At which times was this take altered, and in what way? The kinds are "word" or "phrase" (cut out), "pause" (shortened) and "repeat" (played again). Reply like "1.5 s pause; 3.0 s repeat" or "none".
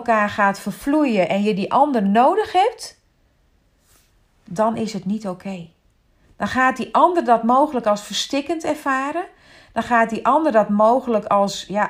none